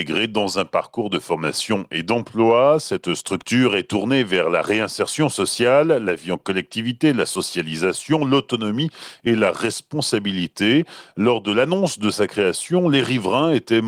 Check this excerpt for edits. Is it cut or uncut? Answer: uncut